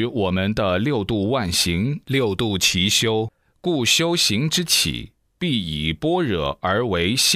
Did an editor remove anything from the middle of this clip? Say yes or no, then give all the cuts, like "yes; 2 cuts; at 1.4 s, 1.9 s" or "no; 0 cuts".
no; 0 cuts